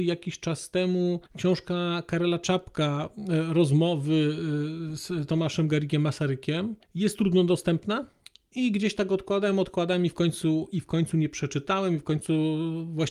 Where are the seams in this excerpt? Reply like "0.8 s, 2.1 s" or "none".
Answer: 1.3 s, 6.8 s, 8.2 s

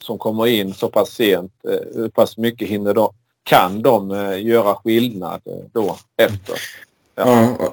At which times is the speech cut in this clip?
none

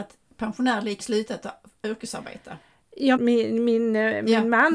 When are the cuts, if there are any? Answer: 1.0 s, 3.2 s

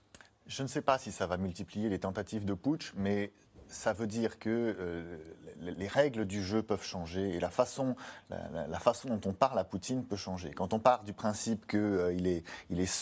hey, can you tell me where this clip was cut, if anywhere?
none

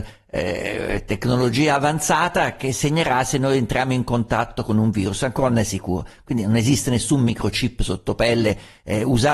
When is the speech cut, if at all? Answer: none

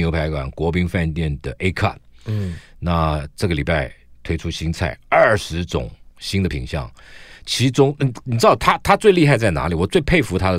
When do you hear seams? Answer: none

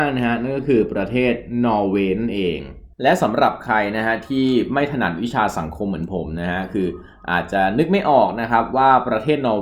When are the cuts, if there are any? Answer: 2.9 s

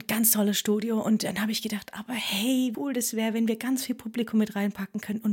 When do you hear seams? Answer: 2.7 s

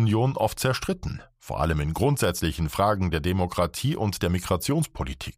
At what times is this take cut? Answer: none

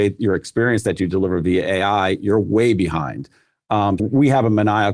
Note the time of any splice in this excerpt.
4.0 s

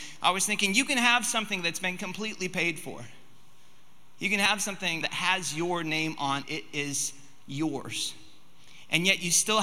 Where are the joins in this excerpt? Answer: 5.0 s, 6.4 s

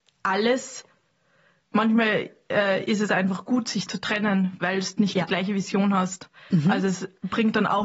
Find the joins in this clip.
none

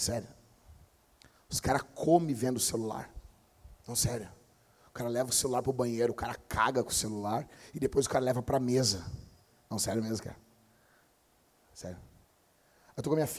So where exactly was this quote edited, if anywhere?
none

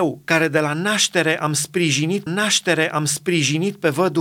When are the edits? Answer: 2.3 s

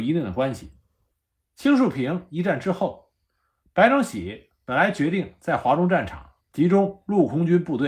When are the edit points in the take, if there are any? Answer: 6.4 s

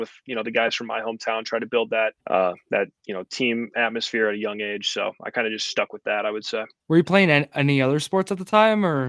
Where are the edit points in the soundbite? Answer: 2.2 s, 3.0 s, 6.8 s

